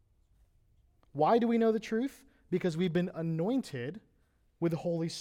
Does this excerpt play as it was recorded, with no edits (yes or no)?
yes